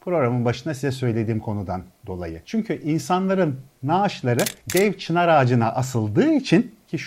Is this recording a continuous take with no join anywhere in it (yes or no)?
yes